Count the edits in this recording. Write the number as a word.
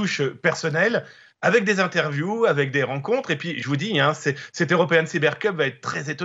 zero